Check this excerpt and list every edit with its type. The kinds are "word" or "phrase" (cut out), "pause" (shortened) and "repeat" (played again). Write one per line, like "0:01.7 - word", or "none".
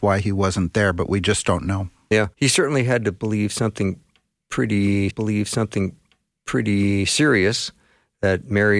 0:02.3 - pause
0:05.1 - repeat